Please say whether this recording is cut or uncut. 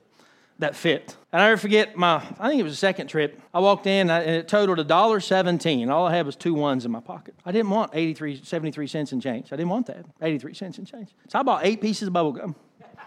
cut